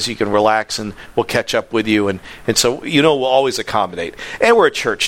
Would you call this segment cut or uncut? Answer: uncut